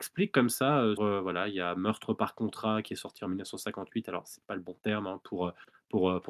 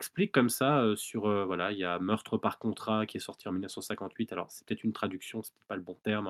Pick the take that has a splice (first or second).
first